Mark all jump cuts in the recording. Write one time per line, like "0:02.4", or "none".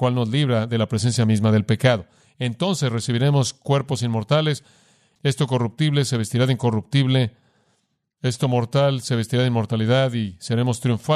none